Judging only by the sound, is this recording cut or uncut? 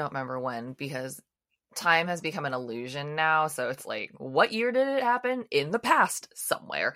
uncut